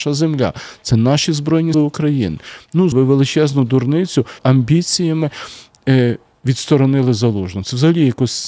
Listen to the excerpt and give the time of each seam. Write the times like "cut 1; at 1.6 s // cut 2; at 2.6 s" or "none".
cut 1; at 1.7 s // cut 2; at 2.9 s // cut 3; at 4.4 s